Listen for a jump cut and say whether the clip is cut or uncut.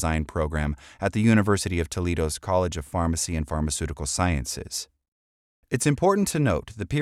uncut